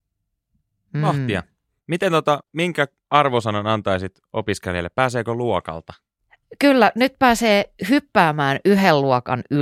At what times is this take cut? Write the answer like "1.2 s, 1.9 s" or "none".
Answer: 2.4 s